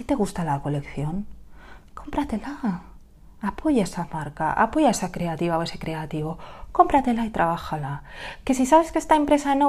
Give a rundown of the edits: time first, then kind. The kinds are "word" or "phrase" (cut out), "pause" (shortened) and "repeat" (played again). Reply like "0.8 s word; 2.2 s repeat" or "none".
none